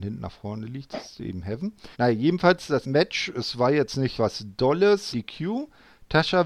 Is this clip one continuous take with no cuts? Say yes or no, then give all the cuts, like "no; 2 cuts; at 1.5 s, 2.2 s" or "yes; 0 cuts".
no; 4 cuts; at 1.9 s, 2.8 s, 4.2 s, 5.1 s